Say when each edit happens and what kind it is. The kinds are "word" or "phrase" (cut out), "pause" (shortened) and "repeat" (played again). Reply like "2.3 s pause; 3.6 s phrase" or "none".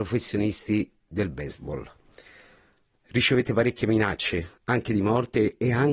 none